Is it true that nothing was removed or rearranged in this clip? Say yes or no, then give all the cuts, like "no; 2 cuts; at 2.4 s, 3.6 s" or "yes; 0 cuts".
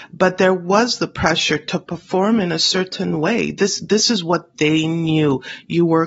yes; 0 cuts